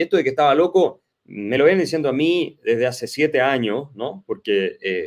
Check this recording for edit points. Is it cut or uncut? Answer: uncut